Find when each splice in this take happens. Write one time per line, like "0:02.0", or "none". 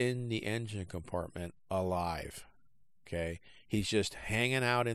none

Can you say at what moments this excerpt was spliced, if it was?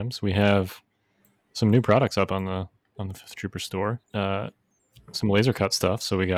0:04.0

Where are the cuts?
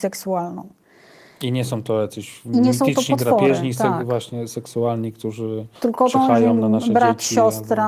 0:05.8

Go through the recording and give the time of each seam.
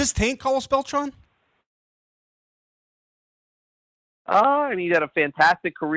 none

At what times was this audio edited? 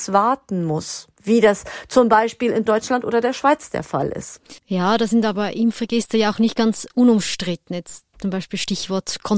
0:04.6

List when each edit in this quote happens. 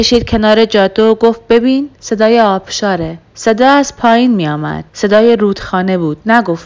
0:01.9
0:03.3
0:04.9

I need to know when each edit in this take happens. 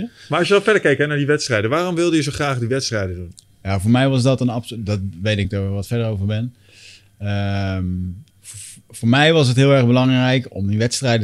0:05.4
0:08.3

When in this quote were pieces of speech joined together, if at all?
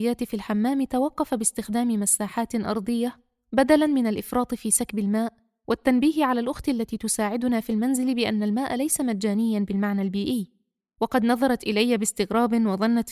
none

